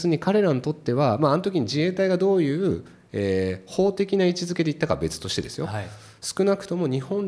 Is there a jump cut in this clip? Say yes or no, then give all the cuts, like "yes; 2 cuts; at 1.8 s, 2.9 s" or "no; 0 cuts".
no; 0 cuts